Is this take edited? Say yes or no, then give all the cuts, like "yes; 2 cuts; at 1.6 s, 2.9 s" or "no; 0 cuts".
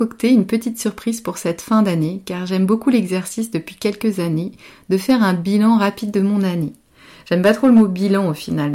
no; 0 cuts